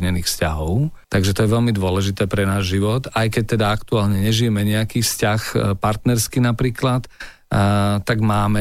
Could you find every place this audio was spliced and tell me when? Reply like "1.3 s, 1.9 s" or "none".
1.0 s